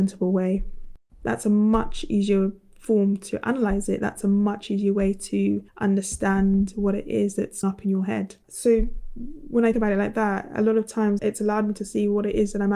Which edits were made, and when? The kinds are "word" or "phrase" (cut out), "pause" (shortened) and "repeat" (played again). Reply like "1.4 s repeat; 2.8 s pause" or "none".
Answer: 1.1 s pause; 5.7 s pause; 7.6 s word; 8.4 s pause; 9.7 s word; 11.2 s word